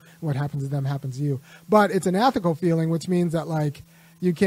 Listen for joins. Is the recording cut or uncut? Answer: uncut